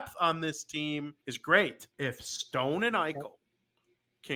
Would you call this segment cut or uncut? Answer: cut